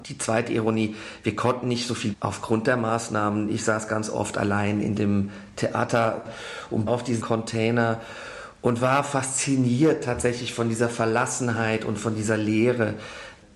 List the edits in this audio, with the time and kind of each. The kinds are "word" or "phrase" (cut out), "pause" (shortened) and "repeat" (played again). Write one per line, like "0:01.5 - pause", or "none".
0:02.1 - word
0:06.9 - word
0:07.2 - word